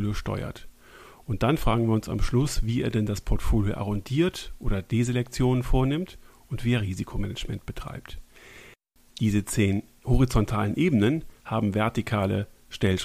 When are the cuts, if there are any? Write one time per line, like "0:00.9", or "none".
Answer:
none

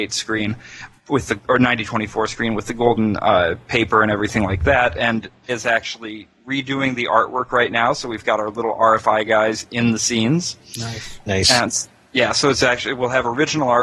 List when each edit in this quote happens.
0:01.0
0:01.4
0:05.5

